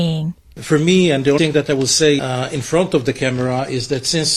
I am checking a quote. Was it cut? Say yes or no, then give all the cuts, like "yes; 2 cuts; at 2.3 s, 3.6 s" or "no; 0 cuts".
yes; 2 cuts; at 1.4 s, 2.2 s